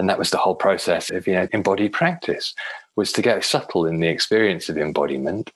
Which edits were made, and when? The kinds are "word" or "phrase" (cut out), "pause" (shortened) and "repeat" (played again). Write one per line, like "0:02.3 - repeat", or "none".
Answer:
0:01.1 - word
0:01.5 - word
0:03.4 - word